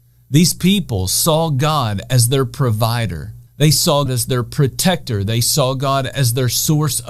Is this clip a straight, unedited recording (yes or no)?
no